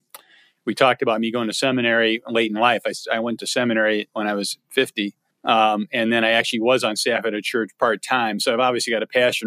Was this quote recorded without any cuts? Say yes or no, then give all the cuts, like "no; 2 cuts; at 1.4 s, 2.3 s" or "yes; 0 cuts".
no; 1 cut; at 5.3 s